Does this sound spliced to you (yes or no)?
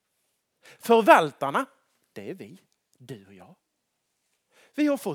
no